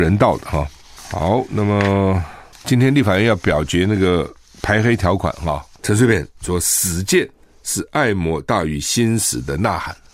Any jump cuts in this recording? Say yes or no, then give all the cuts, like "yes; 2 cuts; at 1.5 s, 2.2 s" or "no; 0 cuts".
no; 0 cuts